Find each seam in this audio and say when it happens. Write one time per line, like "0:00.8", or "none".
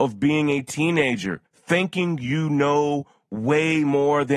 0:01.5